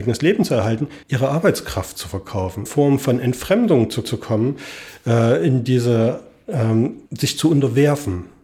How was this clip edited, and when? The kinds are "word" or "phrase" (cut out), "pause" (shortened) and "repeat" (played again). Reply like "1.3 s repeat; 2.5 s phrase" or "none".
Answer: 1.0 s pause; 2.7 s phrase; 4.0 s repeat; 7.1 s pause